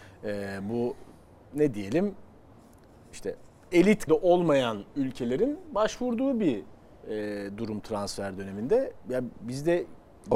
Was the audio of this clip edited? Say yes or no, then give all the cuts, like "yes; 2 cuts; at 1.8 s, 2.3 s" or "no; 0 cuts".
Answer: yes; 1 cut; at 4.1 s